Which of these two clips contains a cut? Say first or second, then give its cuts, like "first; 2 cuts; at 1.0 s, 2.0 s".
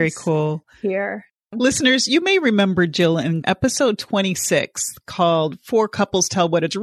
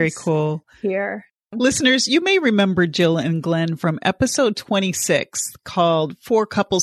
first; 1 cut; at 3.4 s